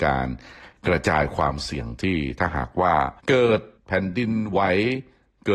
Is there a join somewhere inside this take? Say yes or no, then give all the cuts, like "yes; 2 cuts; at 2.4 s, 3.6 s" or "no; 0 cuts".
yes; 2 cuts; at 3.2 s, 3.8 s